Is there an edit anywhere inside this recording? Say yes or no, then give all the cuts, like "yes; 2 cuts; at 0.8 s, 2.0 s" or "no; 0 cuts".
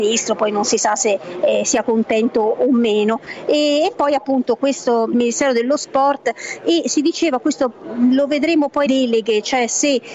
yes; 2 cuts; at 5.1 s, 8.9 s